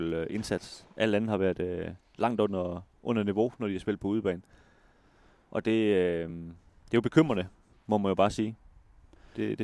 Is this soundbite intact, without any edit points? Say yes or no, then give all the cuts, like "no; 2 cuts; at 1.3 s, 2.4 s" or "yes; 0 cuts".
yes; 0 cuts